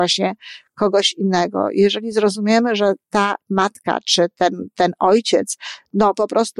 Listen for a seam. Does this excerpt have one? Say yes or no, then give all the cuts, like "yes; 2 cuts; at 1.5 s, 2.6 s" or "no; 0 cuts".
no; 0 cuts